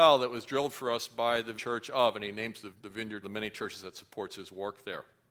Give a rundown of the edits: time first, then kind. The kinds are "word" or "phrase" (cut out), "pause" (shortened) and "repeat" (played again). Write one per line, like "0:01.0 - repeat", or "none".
0:01.6 - word
0:02.7 - word
0:03.2 - phrase